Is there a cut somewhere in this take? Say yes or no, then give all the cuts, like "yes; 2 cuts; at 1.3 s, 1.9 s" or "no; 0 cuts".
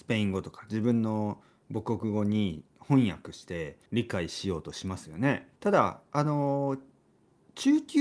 yes; 2 cuts; at 3.9 s, 5.6 s